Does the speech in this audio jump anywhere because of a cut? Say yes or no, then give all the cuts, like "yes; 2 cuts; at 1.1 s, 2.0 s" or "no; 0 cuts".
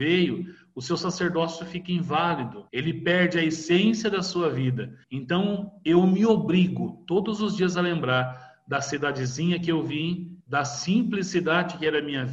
yes; 3 cuts; at 2.7 s, 5.0 s, 10.4 s